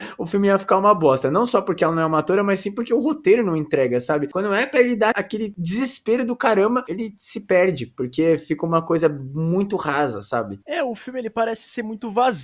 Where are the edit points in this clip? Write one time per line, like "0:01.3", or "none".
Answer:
0:05.1